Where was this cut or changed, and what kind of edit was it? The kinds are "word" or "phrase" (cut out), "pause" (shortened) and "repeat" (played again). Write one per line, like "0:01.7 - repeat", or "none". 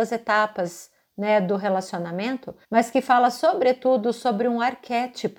0:02.6 - pause